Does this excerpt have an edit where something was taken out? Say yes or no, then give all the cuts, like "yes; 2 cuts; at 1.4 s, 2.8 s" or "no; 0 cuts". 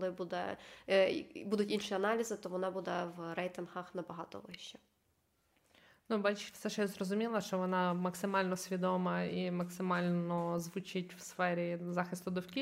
no; 0 cuts